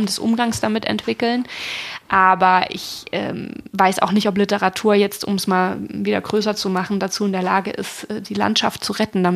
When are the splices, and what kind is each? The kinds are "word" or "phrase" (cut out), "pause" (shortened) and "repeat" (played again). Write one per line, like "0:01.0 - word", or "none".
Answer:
none